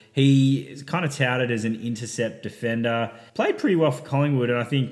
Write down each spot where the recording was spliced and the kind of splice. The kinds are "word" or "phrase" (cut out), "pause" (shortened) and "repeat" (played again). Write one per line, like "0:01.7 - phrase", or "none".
0:03.3 - pause